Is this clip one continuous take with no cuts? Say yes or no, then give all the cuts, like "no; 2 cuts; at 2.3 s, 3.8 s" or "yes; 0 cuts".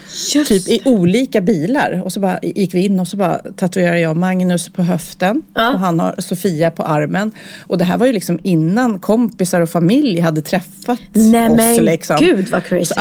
yes; 0 cuts